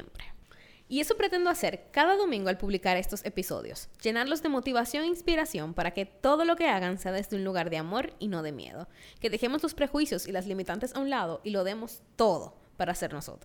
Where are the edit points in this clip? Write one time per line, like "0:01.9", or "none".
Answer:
none